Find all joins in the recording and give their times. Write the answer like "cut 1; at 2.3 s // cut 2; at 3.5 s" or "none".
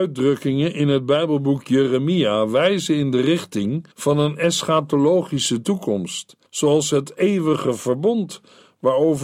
cut 1; at 3.9 s // cut 2; at 6.5 s